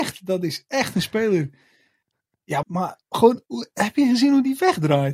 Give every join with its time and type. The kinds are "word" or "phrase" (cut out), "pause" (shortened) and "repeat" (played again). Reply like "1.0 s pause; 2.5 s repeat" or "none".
2.6 s word